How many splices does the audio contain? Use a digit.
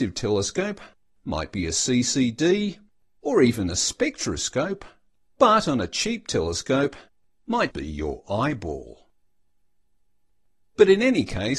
1